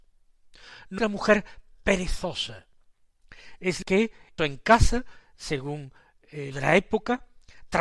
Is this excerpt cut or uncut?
cut